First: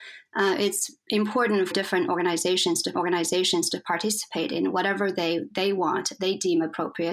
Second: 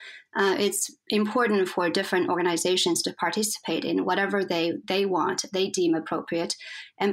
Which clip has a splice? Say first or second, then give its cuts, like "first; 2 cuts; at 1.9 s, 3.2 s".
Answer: first; 2 cuts; at 1.7 s, 2.9 s